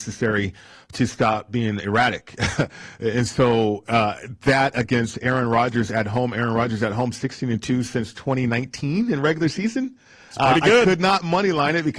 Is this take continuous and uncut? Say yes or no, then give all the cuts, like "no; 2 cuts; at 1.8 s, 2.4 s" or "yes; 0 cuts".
yes; 0 cuts